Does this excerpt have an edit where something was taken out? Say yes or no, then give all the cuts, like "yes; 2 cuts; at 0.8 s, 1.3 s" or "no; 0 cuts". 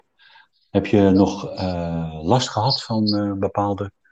no; 0 cuts